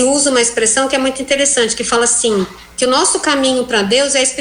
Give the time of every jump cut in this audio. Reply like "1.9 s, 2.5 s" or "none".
2.7 s